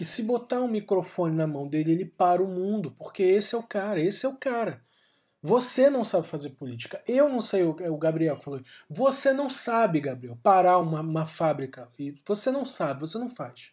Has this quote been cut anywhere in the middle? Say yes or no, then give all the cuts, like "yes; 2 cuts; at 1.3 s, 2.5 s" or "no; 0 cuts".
no; 0 cuts